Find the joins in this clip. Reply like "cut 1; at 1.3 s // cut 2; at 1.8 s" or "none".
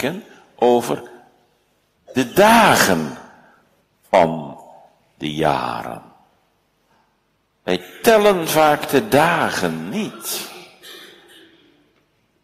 none